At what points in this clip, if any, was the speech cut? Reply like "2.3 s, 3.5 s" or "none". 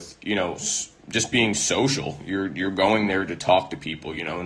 none